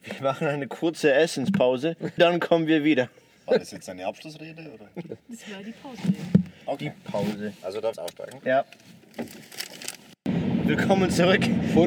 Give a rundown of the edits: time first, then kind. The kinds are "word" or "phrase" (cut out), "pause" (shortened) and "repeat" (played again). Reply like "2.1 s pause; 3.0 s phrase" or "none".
2.2 s word; 5.2 s pause; 7.9 s phrase